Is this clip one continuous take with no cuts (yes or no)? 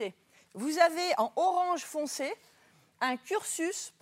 yes